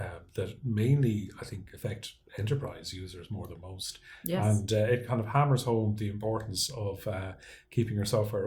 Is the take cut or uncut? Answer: uncut